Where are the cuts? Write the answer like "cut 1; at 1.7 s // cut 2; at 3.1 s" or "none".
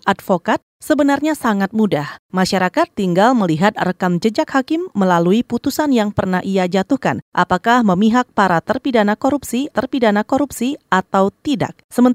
cut 1; at 9.7 s